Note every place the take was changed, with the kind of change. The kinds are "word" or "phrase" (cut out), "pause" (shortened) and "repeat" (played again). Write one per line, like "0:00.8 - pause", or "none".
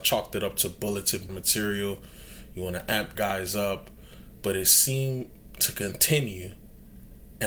0:01.3 - word
0:03.1 - word

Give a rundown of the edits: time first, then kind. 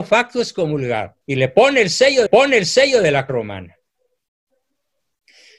0:01.2 - pause
0:02.3 - repeat
0:03.3 - word

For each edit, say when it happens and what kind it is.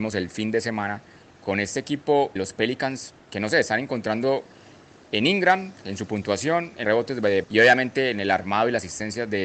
0:02.4 - word
0:06.8 - word
0:07.4 - word

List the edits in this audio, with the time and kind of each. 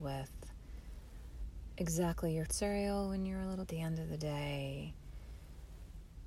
0:02.5 - word
0:03.7 - phrase

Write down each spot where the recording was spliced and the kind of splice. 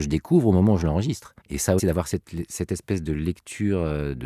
0:01.4 - pause
0:01.8 - word

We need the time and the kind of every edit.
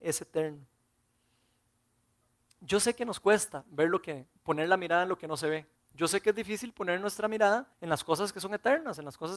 0:04.4 - pause
0:05.8 - pause
0:07.7 - pause

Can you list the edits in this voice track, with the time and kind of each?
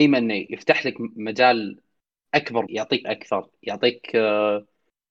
0:02.7 - word
0:03.0 - word

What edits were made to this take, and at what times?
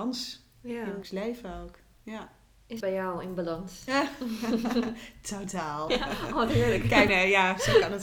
0:01.0 - word
0:02.8 - word
0:05.9 - word
0:07.1 - word

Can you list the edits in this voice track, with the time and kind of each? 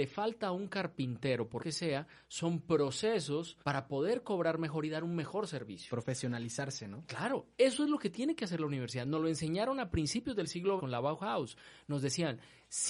0:01.6 - word
0:03.6 - pause
0:10.8 - phrase

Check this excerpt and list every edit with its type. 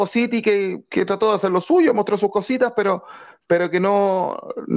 none

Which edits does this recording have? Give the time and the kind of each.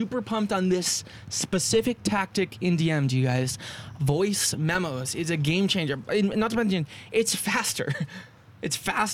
none

